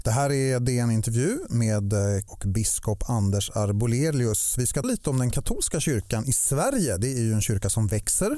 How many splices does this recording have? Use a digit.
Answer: 2